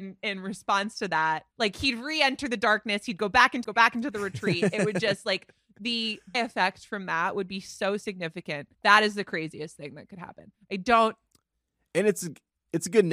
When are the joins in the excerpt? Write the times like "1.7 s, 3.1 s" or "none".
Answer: 1.5 s, 3.6 s, 6.3 s, 8.7 s